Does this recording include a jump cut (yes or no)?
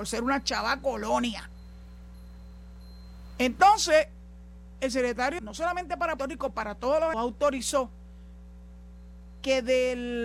yes